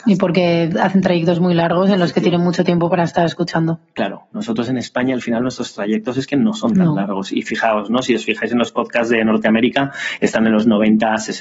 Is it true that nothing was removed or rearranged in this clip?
yes; 0 cuts

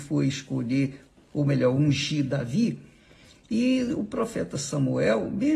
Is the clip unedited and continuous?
yes; 0 cuts

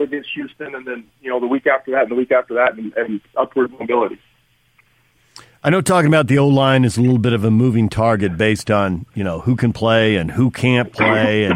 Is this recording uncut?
yes; 0 cuts

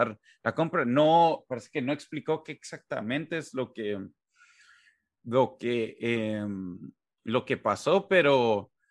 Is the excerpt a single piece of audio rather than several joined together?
yes; 0 cuts

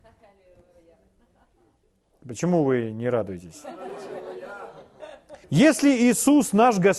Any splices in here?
yes; 1 cut; at 5.4 s

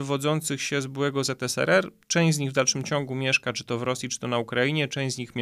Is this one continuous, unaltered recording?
yes; 0 cuts

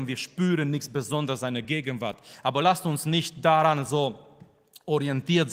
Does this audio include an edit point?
no; 0 cuts

